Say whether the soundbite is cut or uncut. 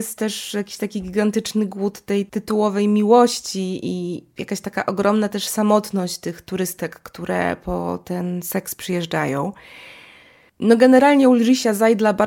uncut